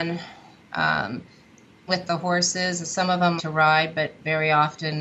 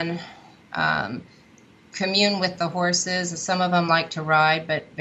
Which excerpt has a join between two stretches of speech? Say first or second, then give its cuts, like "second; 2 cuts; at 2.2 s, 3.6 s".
first; 2 cuts; at 1.9 s, 3.4 s